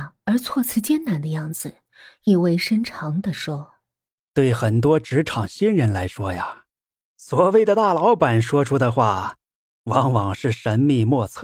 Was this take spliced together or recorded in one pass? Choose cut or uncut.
uncut